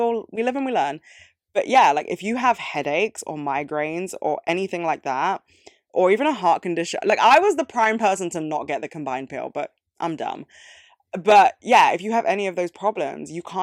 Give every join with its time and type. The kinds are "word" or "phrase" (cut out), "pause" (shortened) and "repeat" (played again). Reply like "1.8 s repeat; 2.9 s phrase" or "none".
none